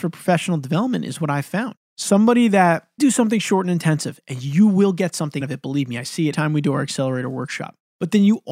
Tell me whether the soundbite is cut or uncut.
cut